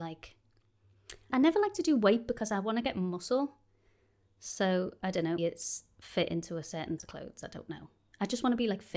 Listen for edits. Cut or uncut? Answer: cut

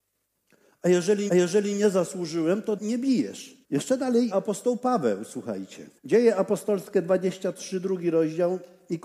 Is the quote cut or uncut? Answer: cut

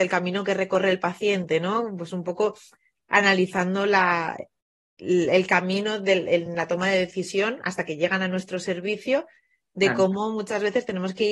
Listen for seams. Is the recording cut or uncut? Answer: uncut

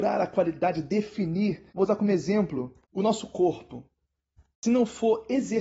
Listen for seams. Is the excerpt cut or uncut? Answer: cut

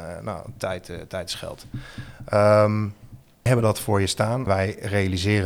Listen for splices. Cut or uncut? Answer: cut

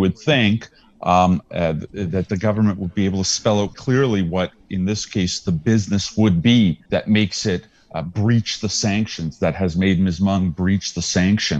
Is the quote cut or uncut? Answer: cut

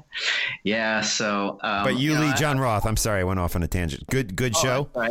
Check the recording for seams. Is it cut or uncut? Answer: uncut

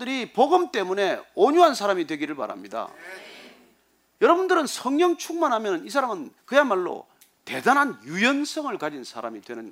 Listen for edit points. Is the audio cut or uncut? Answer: cut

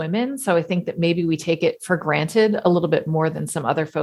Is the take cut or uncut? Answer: uncut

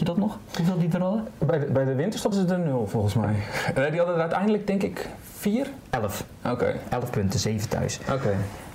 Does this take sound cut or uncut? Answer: cut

